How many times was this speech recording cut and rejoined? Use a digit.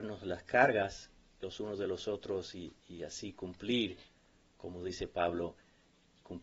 0